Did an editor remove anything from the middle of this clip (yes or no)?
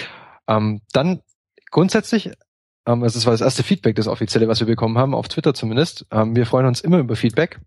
no